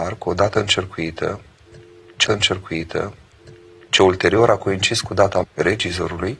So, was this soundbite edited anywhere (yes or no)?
yes